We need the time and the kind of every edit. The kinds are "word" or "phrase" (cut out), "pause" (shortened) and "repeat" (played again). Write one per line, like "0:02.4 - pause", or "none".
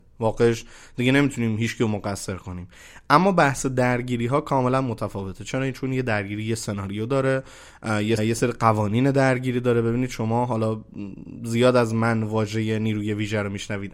0:08.2 - phrase